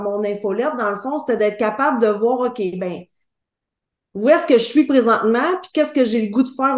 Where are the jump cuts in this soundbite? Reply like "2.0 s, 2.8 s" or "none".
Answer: none